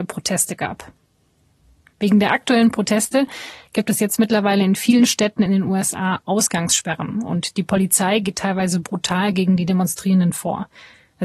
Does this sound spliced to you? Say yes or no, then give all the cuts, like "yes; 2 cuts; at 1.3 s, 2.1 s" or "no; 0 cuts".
no; 0 cuts